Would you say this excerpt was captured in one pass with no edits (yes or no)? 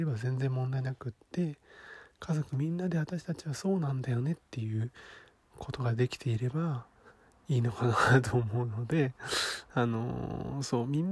yes